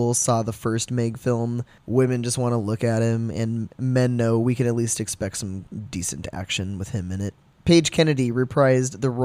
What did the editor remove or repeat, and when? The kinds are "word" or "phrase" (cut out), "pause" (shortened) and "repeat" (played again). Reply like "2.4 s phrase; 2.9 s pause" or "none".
none